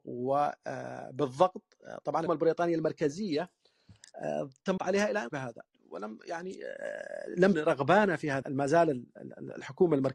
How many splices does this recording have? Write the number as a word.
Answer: six